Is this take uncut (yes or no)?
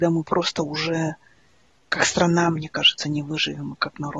yes